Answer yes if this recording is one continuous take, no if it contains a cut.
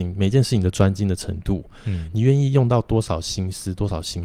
yes